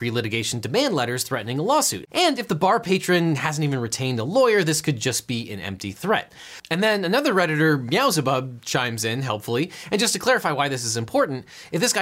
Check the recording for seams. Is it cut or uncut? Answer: uncut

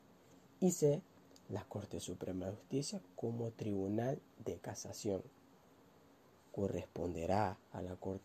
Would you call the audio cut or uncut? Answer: uncut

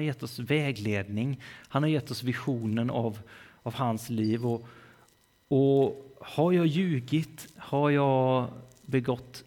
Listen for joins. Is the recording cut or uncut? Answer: uncut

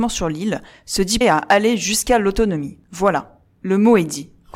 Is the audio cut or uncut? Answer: cut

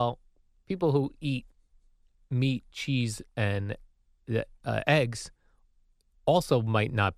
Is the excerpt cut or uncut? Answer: uncut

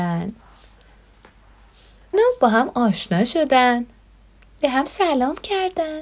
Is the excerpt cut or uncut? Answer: cut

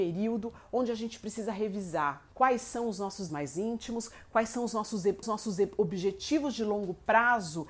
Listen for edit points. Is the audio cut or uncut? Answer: cut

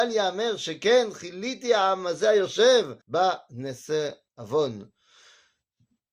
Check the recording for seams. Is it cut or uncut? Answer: cut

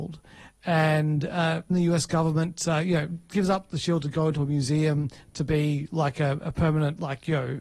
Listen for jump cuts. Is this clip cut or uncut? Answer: cut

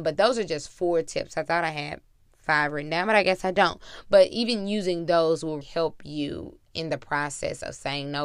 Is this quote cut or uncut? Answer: cut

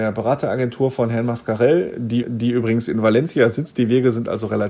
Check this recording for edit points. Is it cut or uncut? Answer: cut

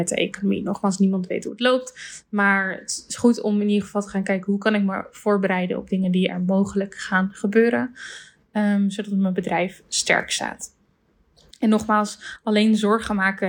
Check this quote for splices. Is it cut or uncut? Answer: uncut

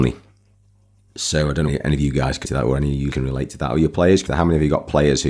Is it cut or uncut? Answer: cut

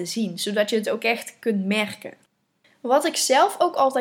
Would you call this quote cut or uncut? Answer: uncut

